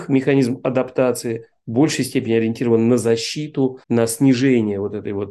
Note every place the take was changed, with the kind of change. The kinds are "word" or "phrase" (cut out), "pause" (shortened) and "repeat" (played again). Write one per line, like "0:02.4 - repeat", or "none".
0:03.8 - pause